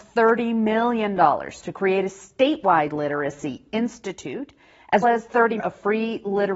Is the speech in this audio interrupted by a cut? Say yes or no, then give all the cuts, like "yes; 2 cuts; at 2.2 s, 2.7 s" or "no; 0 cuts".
yes; 2 cuts; at 5.0 s, 5.6 s